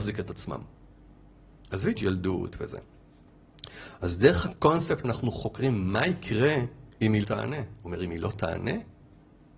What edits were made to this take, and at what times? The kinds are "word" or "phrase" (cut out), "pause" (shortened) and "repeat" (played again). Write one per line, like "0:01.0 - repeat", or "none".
0:02.0 - word
0:05.0 - word
0:06.9 - pause
0:07.2 - word